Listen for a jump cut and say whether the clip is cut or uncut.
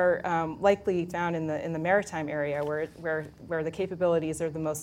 cut